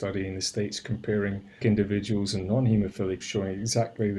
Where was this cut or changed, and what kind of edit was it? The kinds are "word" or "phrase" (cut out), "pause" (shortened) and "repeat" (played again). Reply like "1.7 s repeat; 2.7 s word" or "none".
1.6 s word; 3.2 s word